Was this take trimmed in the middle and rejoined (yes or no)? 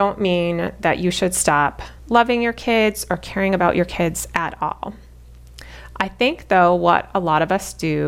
yes